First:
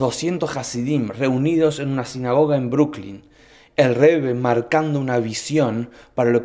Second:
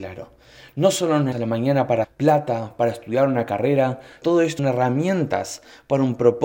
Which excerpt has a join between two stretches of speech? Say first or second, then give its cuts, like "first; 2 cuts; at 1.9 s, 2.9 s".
second; 4 cuts; at 1.3 s, 2.0 s, 4.2 s, 4.6 s